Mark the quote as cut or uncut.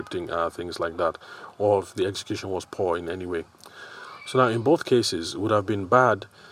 uncut